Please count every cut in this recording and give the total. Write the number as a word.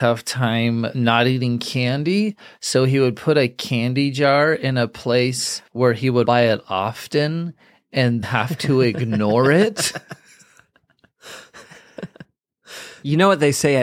two